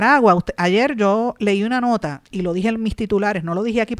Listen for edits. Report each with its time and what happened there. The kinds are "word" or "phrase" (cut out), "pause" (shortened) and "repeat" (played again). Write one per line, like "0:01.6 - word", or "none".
0:02.3 - pause